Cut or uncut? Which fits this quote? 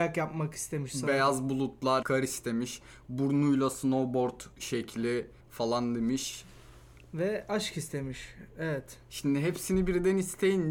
cut